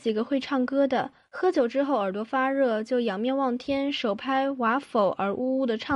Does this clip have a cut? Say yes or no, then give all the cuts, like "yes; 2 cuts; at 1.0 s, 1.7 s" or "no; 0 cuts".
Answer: no; 0 cuts